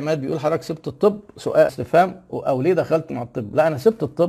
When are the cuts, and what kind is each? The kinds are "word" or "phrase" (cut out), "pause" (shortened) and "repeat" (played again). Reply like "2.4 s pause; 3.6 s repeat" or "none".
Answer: 1.7 s word; 3.1 s word